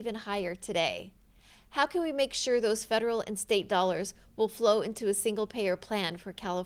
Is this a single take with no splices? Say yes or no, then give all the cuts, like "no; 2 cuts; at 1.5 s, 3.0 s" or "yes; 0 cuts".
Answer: yes; 0 cuts